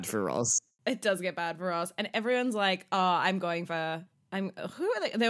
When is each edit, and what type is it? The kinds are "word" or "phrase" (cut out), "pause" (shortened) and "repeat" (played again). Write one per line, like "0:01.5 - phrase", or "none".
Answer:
none